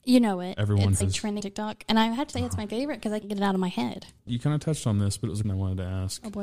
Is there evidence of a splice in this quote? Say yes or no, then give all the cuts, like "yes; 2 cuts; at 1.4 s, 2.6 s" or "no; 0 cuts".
yes; 6 cuts; at 1.0 s, 1.4 s, 2.3 s, 3.2 s, 4.2 s, 5.4 s